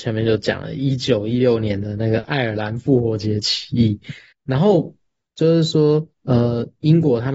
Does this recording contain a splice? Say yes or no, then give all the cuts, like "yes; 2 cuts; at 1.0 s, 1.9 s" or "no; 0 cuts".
yes; 2 cuts; at 4.3 s, 6.1 s